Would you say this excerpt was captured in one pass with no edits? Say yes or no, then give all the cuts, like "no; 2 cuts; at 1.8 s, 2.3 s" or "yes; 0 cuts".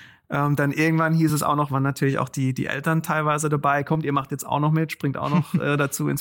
yes; 0 cuts